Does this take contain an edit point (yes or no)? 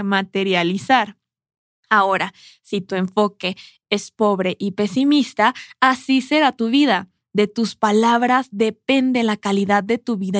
no